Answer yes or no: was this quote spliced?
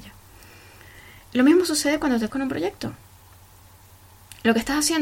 yes